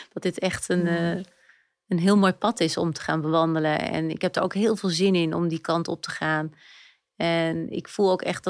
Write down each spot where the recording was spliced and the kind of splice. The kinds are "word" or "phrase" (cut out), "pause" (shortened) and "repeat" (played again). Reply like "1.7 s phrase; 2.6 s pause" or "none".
none